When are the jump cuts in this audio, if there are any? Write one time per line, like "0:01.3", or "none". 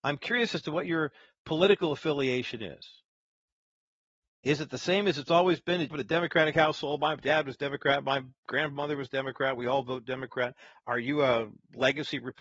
0:05.9